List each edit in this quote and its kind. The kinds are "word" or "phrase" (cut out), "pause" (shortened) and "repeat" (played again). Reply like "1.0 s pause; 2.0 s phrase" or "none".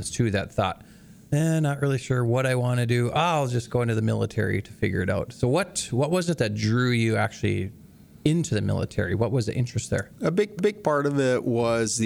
10.6 s repeat